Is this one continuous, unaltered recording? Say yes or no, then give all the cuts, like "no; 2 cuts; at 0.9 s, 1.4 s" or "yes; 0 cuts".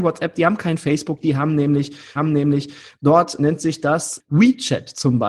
no; 1 cut; at 2.2 s